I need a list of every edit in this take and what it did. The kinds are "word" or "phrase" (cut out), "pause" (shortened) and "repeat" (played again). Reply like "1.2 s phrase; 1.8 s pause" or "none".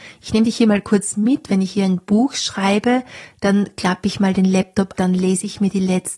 4.9 s word